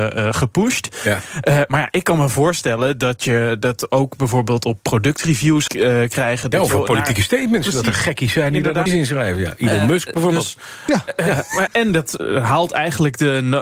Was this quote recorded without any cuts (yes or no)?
no